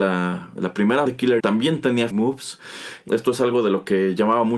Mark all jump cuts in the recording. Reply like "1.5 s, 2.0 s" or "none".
1.1 s, 1.4 s, 2.1 s, 3.1 s

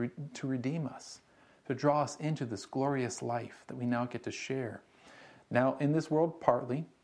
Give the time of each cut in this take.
none

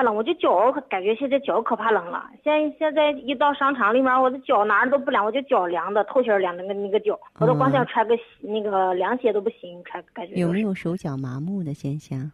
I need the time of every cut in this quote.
7.3 s

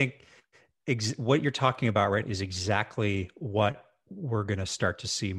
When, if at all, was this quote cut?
2.2 s

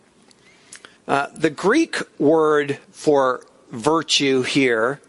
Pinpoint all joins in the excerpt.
1.0 s, 2.8 s

